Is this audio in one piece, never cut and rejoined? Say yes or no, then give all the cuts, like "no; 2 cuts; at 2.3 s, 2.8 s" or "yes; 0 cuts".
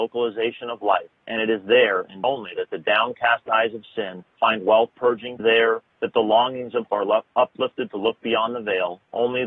no; 6 cuts; at 2.2 s, 4.3 s, 4.9 s, 5.4 s, 5.9 s, 6.9 s